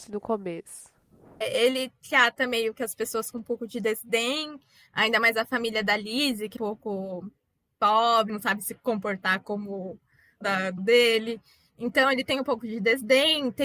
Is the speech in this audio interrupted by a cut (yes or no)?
yes